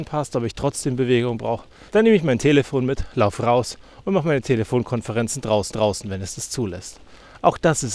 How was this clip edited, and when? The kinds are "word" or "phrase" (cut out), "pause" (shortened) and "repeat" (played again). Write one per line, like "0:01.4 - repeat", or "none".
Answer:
0:01.9 - pause
0:05.7 - repeat